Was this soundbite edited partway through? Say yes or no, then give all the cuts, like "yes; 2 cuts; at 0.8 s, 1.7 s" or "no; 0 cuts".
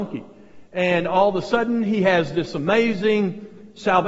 no; 0 cuts